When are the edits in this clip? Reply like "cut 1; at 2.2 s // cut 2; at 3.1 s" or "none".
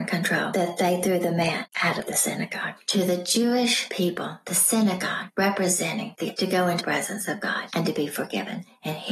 cut 1; at 6.4 s // cut 2; at 6.8 s